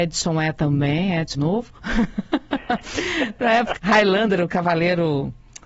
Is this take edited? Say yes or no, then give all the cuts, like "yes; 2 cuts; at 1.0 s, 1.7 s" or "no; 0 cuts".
yes; 2 cuts; at 1.3 s, 3.8 s